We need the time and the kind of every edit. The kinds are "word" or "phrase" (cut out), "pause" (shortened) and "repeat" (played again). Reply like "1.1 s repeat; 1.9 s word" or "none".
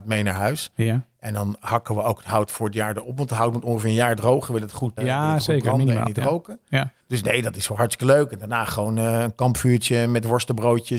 5.0 s word; 7.0 s pause